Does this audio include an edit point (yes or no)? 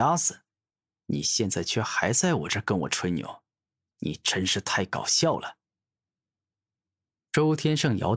no